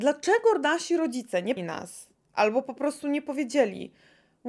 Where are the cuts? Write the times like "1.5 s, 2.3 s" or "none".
1.6 s